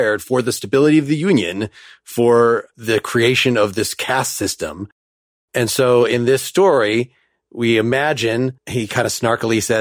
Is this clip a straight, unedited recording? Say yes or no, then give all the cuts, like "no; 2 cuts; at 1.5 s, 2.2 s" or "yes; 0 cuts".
yes; 0 cuts